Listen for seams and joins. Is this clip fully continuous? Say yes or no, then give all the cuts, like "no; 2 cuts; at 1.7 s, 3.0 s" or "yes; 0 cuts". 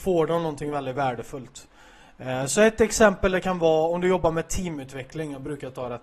yes; 0 cuts